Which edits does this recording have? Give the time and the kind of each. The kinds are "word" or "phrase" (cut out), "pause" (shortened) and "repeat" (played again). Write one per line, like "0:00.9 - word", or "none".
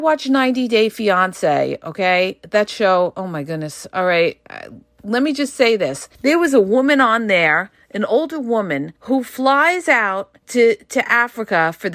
0:06.1 - pause
0:09.0 - pause
0:10.4 - pause

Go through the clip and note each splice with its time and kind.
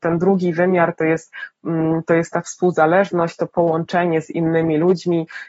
none

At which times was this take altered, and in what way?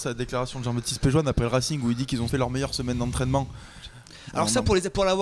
0:02.3 - word

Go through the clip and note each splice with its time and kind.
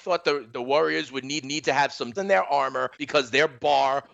0:01.4 - repeat
0:02.2 - word
0:02.9 - pause

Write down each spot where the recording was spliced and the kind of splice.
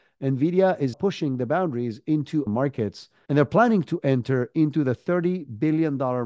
0:00.9 - word
0:02.5 - word

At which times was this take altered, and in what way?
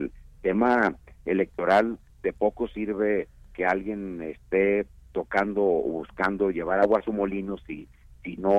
none

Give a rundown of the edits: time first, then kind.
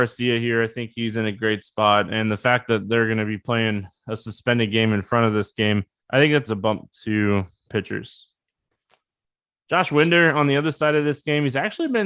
0:06.0 - pause
0:06.5 - word
0:07.7 - word

